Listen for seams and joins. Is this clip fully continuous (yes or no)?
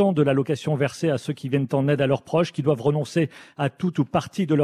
yes